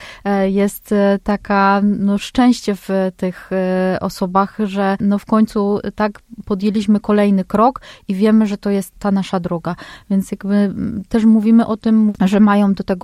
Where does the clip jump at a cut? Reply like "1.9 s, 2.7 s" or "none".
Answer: none